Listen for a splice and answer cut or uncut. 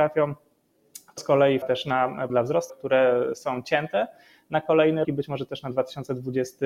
cut